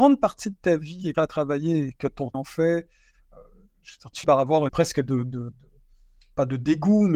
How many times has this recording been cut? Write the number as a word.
four